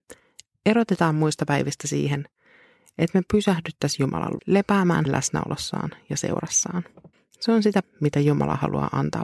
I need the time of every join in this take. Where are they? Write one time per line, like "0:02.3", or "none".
0:04.4
0:05.1
0:07.1
0:07.8

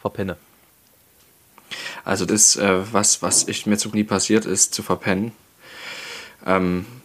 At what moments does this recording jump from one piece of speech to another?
0:02.3
0:03.9
0:04.7

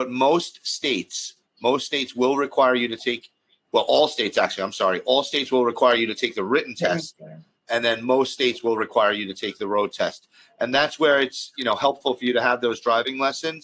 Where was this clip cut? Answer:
none

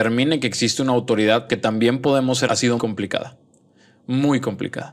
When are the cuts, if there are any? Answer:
0:01.5
0:02.5
0:02.8

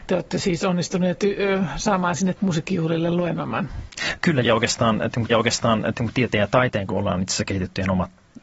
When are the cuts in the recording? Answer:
0:02.4
0:04.4
0:05.3
0:06.9

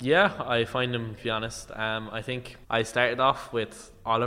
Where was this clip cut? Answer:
0:01.2
0:02.6

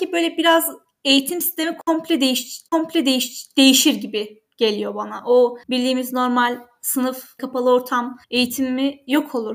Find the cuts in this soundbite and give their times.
0:02.7
0:05.6
0:07.4
0:08.2

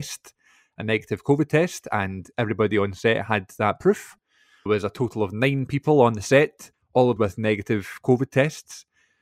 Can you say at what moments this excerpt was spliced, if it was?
0:04.7
0:06.7
0:07.2

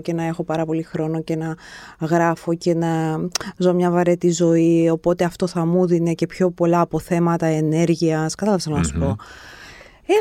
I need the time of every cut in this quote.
none

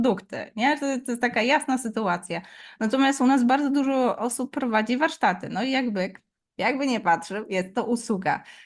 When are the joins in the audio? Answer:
none

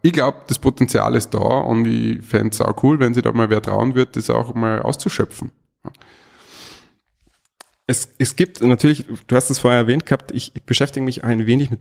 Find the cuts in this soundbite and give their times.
none

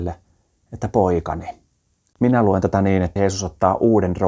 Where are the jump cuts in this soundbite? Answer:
0:03.2

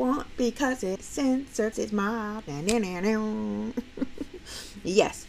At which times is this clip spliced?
0:01.0
0:01.7
0:02.5

